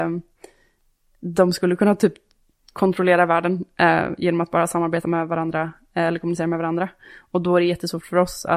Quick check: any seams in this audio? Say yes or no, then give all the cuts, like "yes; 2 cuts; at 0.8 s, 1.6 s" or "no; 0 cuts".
no; 0 cuts